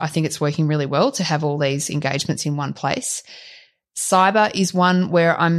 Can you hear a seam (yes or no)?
no